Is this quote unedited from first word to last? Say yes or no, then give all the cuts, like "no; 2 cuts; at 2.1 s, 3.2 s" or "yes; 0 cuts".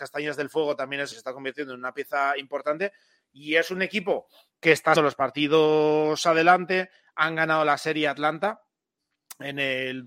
no; 2 cuts; at 1.1 s, 5.0 s